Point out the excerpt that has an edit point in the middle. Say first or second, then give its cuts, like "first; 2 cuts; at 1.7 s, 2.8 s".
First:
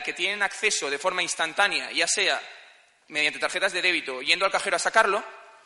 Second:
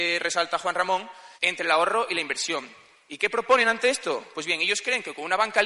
second; 1 cut; at 1.4 s